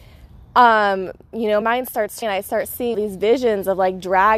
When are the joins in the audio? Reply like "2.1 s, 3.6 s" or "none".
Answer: 1.6 s, 2.2 s, 2.9 s